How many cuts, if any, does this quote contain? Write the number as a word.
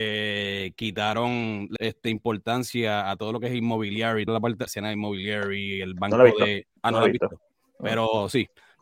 four